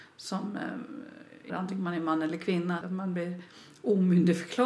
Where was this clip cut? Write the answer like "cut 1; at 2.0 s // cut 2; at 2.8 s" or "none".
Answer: cut 1; at 1.5 s // cut 2; at 2.8 s